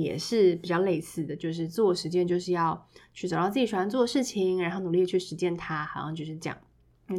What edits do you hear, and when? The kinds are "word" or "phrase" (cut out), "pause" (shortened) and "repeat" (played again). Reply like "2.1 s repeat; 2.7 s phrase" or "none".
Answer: none